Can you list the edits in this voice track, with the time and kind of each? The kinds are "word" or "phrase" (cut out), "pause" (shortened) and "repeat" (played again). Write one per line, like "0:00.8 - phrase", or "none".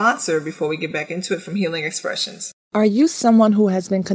none